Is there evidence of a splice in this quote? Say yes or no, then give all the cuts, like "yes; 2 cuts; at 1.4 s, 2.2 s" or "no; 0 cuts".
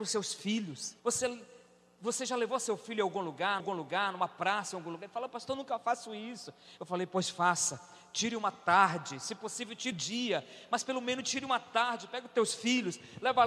yes; 3 cuts; at 1.0 s, 3.6 s, 9.9 s